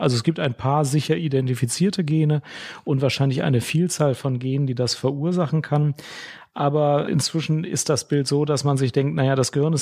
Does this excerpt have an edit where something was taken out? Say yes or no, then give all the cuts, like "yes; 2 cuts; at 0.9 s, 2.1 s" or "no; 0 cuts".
no; 0 cuts